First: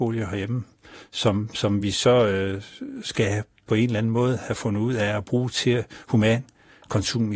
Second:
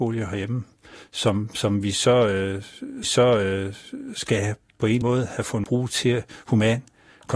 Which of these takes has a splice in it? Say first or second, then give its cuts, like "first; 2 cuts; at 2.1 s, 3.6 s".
second; 3 cuts; at 3.0 s, 5.0 s, 5.6 s